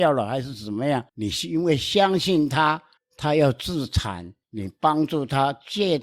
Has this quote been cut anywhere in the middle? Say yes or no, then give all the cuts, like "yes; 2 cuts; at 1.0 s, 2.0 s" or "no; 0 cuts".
yes; 3 cuts; at 1.1 s, 3.0 s, 4.4 s